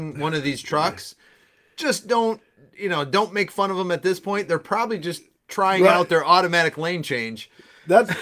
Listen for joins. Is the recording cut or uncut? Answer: uncut